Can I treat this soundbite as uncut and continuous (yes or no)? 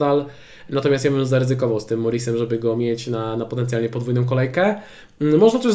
yes